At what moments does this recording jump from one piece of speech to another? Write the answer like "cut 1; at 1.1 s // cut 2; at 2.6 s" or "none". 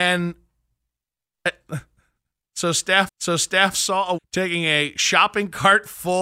cut 1; at 3.1 s // cut 2; at 4.2 s